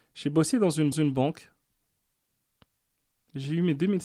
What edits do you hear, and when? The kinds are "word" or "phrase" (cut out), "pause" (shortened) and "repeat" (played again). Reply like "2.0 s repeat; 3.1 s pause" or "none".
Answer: 0.9 s repeat